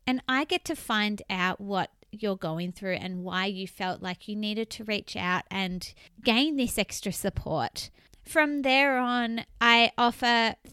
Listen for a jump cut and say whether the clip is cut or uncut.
uncut